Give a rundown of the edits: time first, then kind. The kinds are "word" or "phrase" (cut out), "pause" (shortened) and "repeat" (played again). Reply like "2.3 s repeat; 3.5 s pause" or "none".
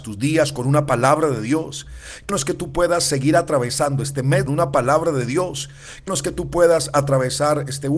2.3 s word; 4.5 s phrase; 6.1 s word